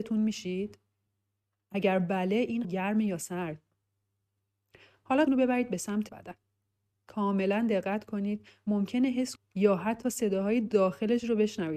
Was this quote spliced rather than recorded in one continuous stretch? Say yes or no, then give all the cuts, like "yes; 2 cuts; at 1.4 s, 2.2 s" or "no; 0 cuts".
yes; 4 cuts; at 2.6 s, 5.3 s, 6.1 s, 9.4 s